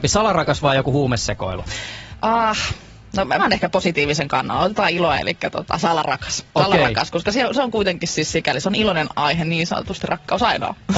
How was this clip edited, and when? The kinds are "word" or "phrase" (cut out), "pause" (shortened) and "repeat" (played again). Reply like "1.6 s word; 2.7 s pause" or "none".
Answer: 3.4 s word; 5.1 s word